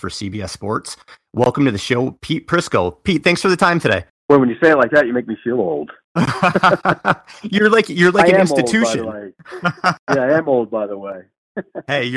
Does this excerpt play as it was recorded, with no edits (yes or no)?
no